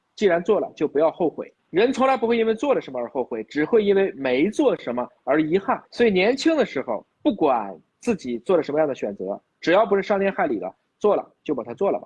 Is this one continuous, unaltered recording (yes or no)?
no